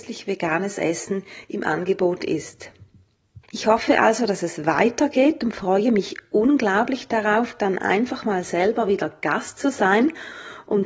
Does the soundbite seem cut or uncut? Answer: cut